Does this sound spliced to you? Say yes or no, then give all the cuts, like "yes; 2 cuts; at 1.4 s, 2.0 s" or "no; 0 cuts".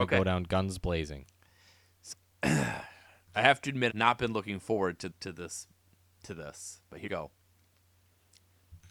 yes; 4 cuts; at 2.1 s, 3.9 s, 5.1 s, 7.1 s